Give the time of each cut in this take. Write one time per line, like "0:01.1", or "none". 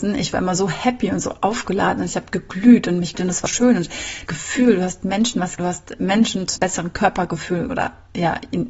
0:03.1
0:03.5
0:04.3
0:05.6
0:06.6
0:07.7